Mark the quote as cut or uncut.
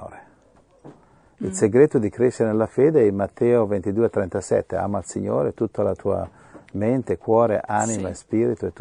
uncut